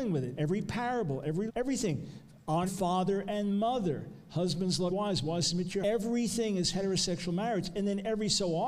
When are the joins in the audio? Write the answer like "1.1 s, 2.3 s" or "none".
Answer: 1.5 s, 2.7 s, 4.9 s, 5.8 s